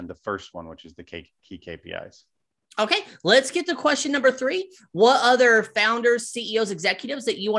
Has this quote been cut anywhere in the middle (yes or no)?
no